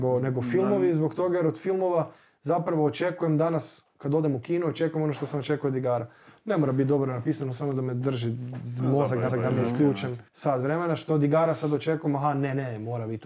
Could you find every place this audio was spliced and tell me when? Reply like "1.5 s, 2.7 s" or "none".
9.3 s, 10.3 s